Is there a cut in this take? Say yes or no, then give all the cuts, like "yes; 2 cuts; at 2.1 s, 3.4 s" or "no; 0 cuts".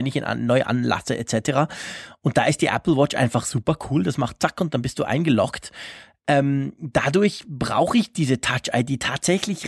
no; 0 cuts